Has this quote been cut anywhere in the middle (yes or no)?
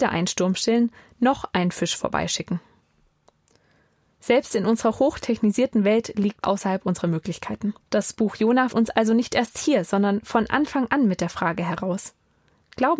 yes